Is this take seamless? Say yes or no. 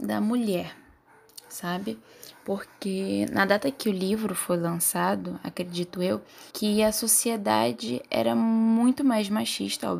no